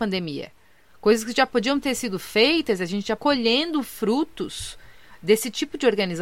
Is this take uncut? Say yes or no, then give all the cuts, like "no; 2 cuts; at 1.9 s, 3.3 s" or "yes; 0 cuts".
no; 1 cut; at 3.2 s